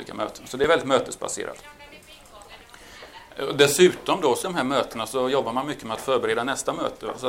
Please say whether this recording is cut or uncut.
cut